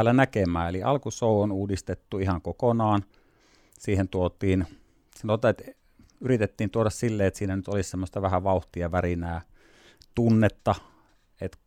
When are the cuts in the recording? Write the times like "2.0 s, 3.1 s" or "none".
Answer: none